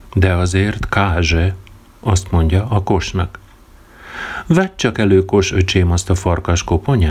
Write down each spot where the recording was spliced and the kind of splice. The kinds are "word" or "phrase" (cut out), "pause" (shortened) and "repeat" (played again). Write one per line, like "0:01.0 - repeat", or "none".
none